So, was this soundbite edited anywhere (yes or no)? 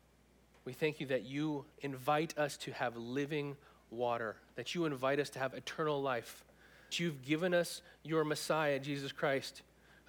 yes